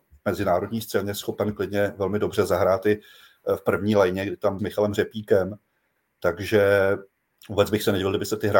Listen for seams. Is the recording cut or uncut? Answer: cut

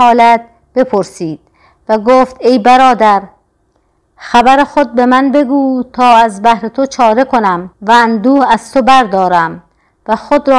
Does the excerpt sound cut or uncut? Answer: cut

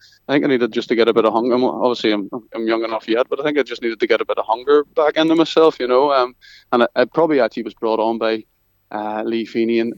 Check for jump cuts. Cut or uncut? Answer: uncut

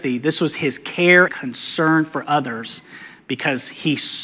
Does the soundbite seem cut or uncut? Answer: cut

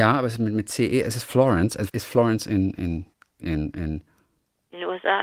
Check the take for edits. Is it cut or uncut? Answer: cut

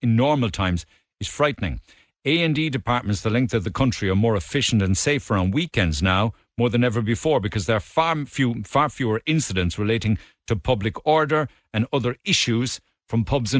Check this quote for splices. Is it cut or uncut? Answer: uncut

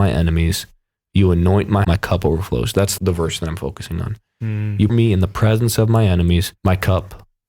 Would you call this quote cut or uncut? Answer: cut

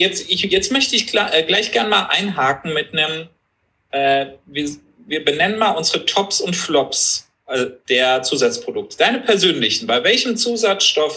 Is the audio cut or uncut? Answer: uncut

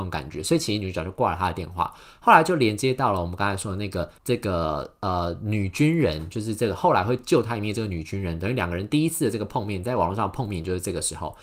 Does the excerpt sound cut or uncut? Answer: cut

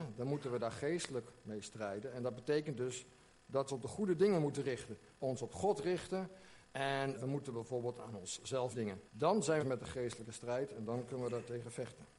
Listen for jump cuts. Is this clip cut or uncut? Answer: cut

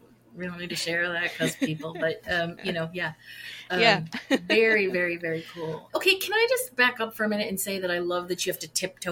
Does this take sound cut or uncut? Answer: cut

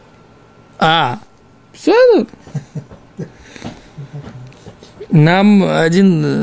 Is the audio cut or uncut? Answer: uncut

